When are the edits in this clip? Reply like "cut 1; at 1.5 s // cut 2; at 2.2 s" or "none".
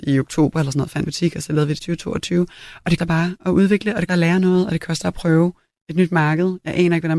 cut 1; at 1.1 s // cut 2; at 1.8 s // cut 3; at 3.0 s // cut 4; at 4.1 s